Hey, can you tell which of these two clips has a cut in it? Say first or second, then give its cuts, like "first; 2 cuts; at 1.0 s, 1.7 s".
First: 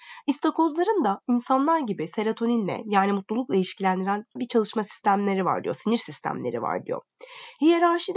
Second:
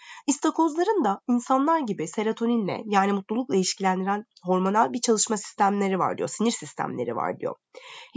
first; 1 cut; at 4.4 s